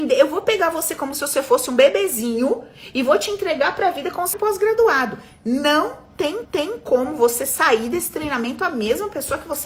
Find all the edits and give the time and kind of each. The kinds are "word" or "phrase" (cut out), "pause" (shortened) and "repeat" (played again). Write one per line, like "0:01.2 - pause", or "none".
0:04.3 - phrase
0:06.4 - repeat